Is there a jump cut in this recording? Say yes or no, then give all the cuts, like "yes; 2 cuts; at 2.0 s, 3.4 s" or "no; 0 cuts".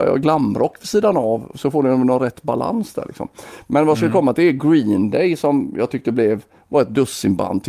no; 0 cuts